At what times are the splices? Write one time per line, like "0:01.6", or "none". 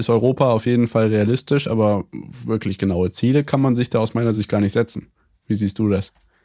none